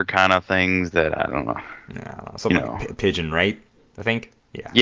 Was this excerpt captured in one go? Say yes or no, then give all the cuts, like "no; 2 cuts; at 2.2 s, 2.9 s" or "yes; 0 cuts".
yes; 0 cuts